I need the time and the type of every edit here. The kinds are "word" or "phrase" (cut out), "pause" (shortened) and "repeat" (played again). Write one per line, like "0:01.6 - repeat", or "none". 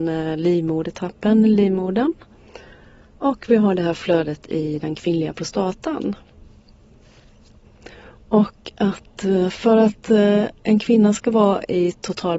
none